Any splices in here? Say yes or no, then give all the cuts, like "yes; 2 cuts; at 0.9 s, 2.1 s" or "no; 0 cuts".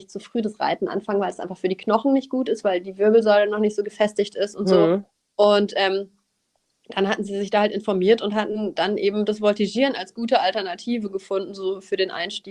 no; 0 cuts